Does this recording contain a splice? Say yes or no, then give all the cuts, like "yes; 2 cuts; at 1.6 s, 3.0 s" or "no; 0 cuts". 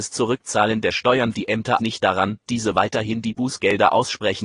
yes; 3 cuts; at 1.3 s, 1.8 s, 2.5 s